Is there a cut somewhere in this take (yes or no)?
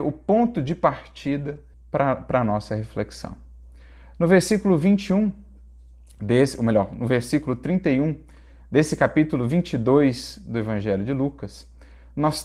yes